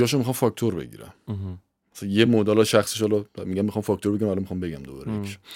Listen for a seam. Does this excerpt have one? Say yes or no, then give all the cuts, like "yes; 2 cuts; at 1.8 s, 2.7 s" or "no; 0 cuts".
no; 0 cuts